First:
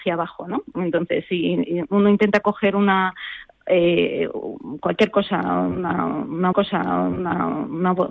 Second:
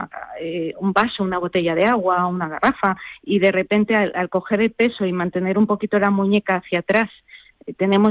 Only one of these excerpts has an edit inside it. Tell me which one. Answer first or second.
first